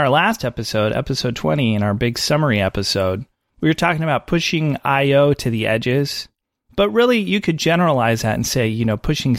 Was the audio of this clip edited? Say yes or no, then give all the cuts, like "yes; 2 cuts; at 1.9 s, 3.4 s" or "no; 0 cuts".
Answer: no; 0 cuts